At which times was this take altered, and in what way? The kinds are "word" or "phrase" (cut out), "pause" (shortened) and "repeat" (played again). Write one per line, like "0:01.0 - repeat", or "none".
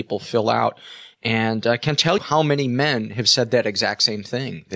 0:02.2 - word